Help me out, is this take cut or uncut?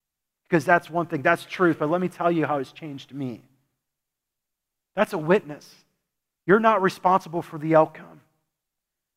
uncut